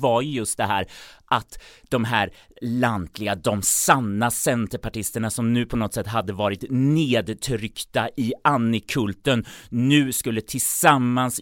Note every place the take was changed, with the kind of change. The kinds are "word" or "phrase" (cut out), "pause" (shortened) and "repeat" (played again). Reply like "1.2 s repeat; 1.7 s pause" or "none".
none